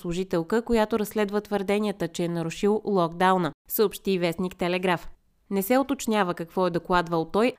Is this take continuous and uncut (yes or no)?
yes